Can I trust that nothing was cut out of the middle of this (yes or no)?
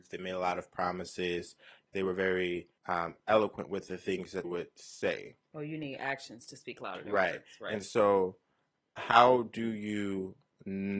no